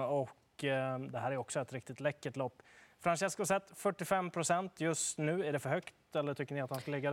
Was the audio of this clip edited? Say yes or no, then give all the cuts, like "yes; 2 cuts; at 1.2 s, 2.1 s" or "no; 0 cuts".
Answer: no; 0 cuts